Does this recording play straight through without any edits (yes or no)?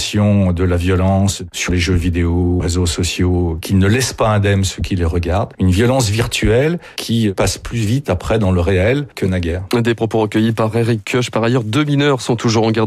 yes